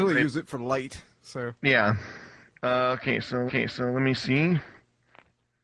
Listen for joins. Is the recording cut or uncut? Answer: cut